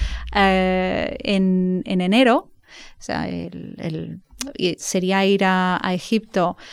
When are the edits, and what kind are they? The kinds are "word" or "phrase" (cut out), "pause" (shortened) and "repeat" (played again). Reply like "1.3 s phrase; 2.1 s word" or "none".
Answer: none

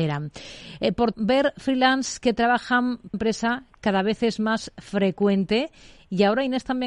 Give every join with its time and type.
1.1 s word; 3.1 s phrase

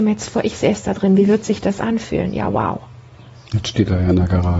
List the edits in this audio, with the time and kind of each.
none

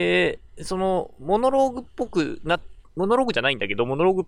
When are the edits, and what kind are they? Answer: 2.8 s pause

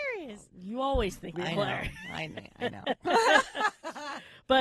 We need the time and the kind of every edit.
1.3 s word

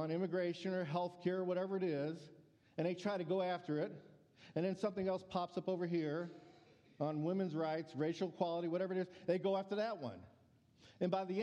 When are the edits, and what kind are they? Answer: none

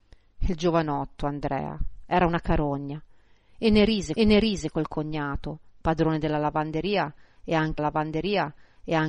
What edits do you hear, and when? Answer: 4.2 s repeat; 7.8 s repeat

